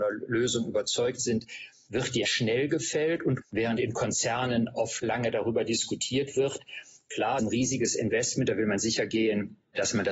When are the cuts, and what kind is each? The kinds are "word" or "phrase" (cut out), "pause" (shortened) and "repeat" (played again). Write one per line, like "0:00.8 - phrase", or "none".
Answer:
0:02.2 - phrase
0:03.4 - word
0:05.0 - word
0:07.4 - phrase